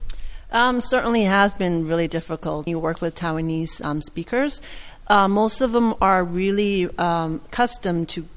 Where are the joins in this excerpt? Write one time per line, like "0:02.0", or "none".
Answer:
0:02.7